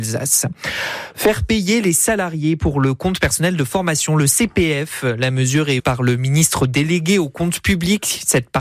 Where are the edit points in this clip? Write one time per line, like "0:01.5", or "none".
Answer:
0:05.8

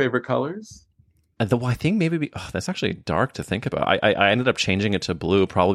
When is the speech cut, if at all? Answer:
none

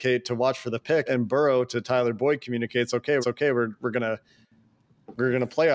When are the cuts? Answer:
0:01.1
0:03.2

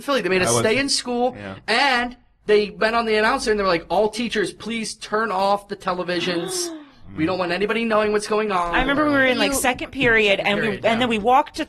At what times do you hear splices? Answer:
none

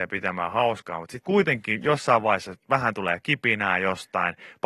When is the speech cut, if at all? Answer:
0:01.2

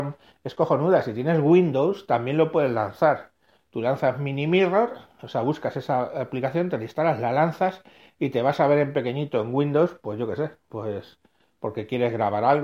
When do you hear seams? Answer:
none

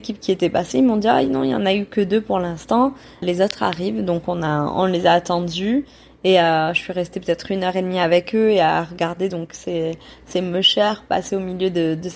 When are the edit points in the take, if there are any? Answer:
none

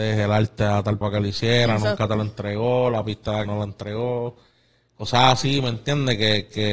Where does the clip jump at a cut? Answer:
0:01.0
0:03.5

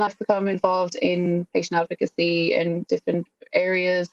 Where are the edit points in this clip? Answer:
0:02.9

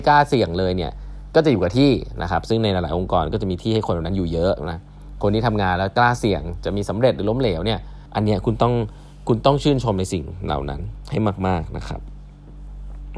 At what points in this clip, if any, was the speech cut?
0:08.1

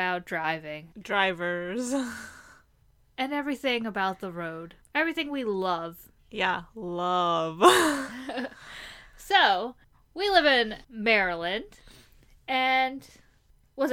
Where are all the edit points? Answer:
0:00.9
0:04.8
0:06.2
0:09.8
0:10.8

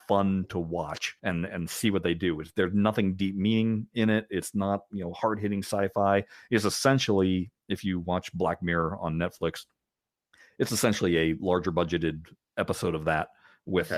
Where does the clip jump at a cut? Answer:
0:01.2

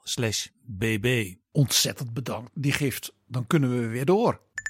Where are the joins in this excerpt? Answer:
0:02.5

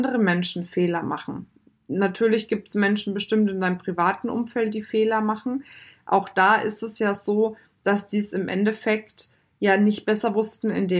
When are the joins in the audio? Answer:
none

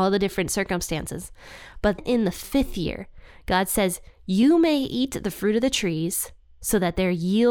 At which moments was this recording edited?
0:02.0

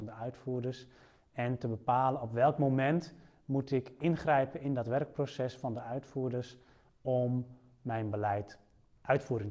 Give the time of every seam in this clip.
none

